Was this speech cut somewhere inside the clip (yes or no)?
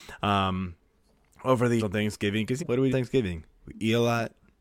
yes